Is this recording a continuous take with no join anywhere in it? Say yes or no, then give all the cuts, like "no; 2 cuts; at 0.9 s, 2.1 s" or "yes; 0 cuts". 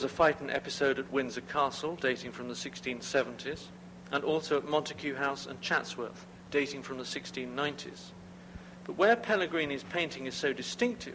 yes; 0 cuts